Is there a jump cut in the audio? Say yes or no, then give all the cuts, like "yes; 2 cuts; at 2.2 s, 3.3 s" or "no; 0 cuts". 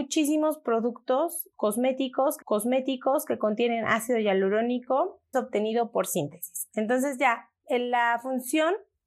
yes; 2 cuts; at 2.4 s, 5.3 s